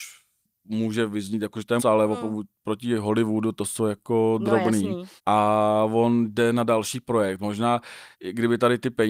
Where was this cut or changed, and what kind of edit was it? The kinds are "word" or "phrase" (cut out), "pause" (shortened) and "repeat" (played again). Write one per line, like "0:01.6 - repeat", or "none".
0:01.8 - word
0:05.2 - pause
0:08.1 - pause

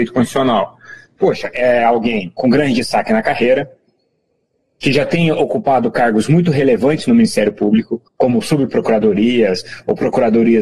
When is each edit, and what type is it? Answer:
0:08.1 - pause

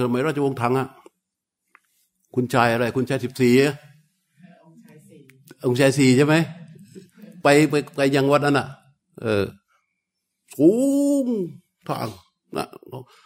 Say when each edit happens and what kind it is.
none

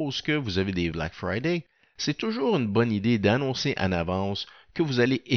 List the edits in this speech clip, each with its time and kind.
0:00.9 - phrase

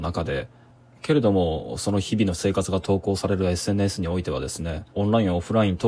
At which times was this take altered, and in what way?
0:04.9 - pause

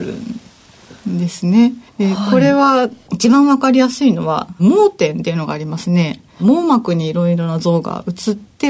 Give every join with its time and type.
0:01.9 - pause

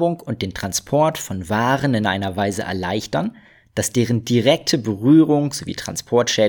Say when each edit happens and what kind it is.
none

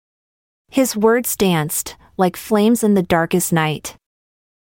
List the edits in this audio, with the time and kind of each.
none

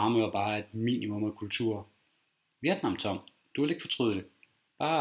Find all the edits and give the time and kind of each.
none

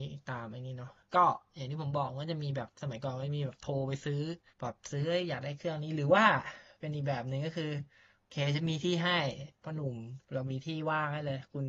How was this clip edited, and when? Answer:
0:04.5 - pause
0:10.2 - pause

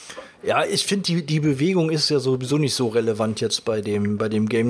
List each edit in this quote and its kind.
none

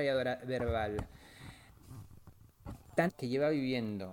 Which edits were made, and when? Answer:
0:03.1 - word

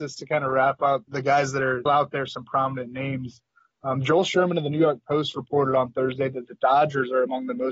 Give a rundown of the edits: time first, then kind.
0:01.1 - word
0:01.9 - word

